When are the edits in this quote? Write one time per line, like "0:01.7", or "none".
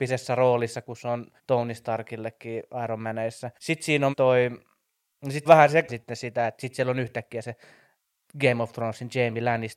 0:01.4
0:03.6
0:04.1
0:05.4
0:05.9